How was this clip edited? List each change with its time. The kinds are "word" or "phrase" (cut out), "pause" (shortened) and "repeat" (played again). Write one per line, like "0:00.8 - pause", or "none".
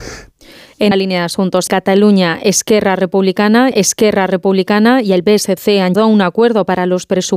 0:00.9 - word
0:01.7 - word
0:03.7 - repeat
0:06.0 - word